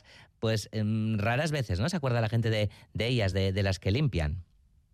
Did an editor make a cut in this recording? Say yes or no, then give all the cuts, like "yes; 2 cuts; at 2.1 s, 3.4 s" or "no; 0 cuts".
no; 0 cuts